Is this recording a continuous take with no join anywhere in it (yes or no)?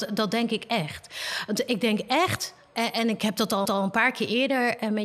no